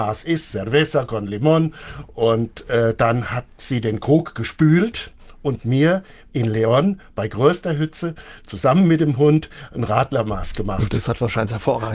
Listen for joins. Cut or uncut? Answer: uncut